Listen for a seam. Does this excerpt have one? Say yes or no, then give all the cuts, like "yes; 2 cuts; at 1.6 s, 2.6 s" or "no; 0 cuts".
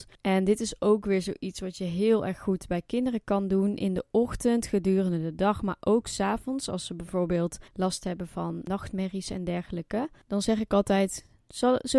yes; 1 cut; at 7.7 s